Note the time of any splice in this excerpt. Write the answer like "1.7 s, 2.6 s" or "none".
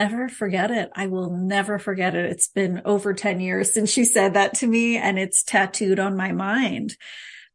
none